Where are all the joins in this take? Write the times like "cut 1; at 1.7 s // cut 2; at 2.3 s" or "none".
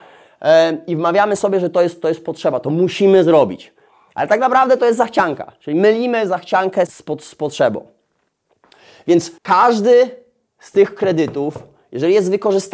cut 1; at 6.9 s // cut 2; at 9.4 s